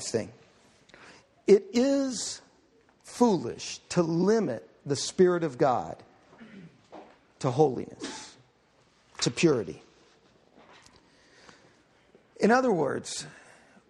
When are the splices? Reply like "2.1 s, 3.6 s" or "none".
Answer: none